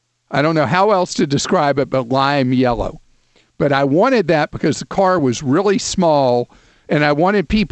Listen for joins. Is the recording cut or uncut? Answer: uncut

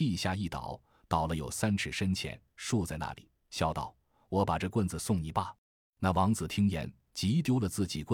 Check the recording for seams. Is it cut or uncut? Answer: cut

